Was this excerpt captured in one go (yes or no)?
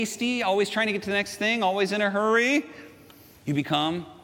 yes